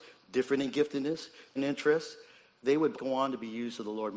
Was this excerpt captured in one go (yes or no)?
no